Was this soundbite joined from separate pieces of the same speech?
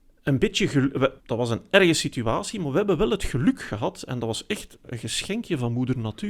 yes; 1 cut; at 1.2 s

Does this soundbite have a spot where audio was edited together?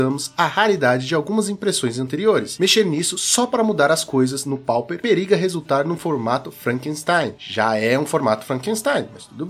no; 0 cuts

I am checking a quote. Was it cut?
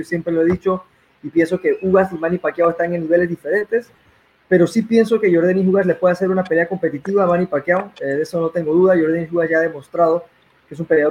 no; 0 cuts

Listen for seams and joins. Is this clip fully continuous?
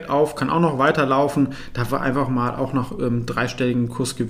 yes; 0 cuts

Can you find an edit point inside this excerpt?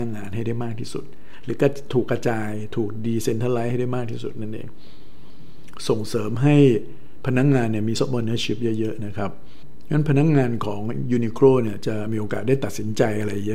yes; 1 cut; at 8.0 s

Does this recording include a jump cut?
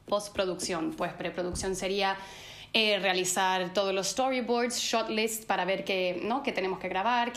no; 0 cuts

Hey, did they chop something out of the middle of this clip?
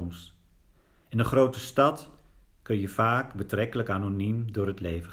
no; 0 cuts

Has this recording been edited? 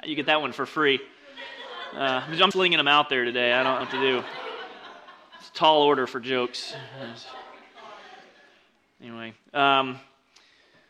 yes; 2 cuts; at 2.5 s, 3.8 s

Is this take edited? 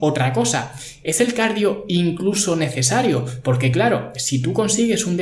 no; 0 cuts

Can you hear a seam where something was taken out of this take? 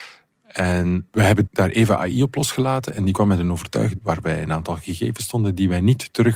yes; 2 cuts; at 1.5 s, 4.0 s

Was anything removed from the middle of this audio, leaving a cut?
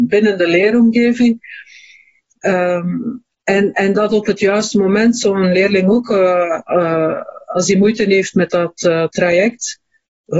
no; 0 cuts

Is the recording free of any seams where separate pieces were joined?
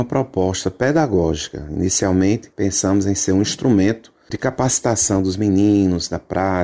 yes; 0 cuts

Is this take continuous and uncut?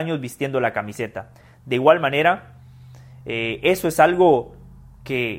yes; 0 cuts

